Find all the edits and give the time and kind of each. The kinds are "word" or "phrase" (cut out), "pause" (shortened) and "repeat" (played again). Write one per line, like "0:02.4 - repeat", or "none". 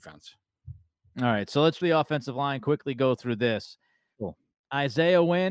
0:01.8 - word
0:04.1 - word